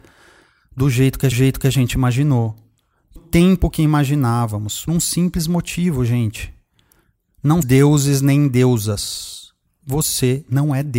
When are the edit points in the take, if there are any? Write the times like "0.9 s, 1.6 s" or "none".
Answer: 1.3 s, 3.2 s, 4.9 s, 7.6 s